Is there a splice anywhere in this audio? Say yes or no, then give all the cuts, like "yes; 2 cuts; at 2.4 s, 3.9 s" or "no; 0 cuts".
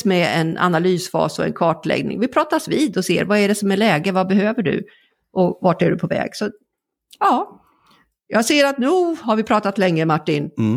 no; 0 cuts